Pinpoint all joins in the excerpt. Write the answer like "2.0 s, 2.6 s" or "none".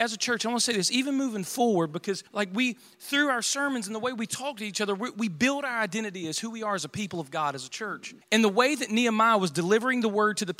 2.3 s, 8.2 s

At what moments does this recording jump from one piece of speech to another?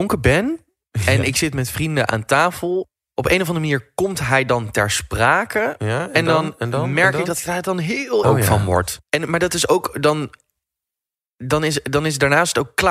8.2 s, 9.1 s

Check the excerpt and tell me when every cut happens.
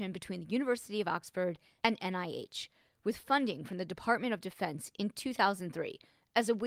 none

